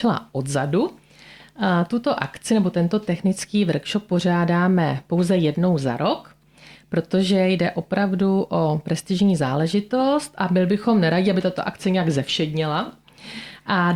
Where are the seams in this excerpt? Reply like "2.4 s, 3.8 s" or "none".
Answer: none